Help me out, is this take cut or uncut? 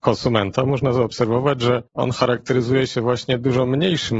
cut